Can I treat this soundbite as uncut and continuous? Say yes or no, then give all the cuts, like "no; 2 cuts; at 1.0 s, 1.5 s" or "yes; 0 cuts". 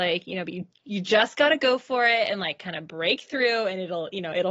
yes; 0 cuts